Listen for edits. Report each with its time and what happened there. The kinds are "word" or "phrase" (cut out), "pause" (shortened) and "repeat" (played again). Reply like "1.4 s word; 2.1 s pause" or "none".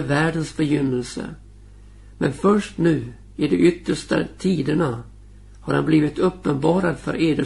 none